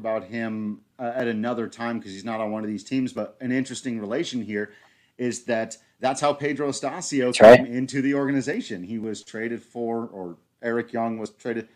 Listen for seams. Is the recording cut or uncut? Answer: uncut